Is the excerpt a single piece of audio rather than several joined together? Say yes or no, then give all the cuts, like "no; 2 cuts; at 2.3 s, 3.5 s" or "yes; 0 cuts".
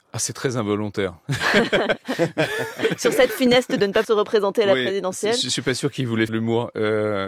no; 3 cuts; at 3.3 s, 4.0 s, 6.3 s